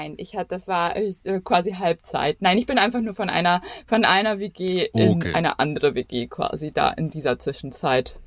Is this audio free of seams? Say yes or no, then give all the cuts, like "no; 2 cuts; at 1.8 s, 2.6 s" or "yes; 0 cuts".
yes; 0 cuts